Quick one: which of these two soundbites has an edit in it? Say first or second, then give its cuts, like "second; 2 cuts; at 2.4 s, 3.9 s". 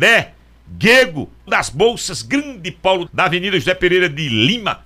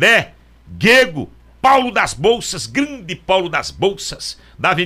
first; 2 cuts; at 1.5 s, 3.1 s